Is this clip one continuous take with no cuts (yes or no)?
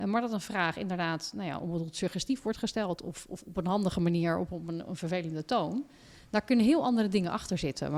yes